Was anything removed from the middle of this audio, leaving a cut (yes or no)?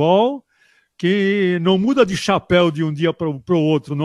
no